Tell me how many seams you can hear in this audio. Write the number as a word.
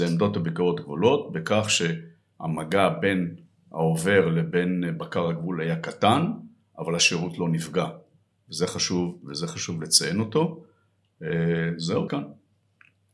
one